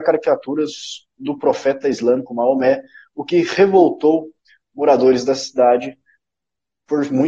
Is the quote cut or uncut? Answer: uncut